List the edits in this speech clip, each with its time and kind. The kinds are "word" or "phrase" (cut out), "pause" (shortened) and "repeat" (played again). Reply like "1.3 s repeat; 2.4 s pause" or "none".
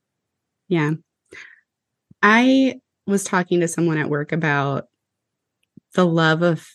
none